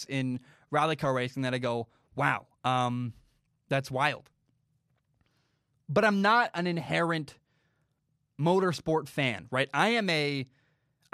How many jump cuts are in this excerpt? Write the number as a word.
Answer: zero